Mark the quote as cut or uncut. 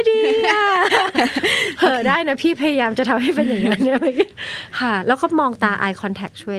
uncut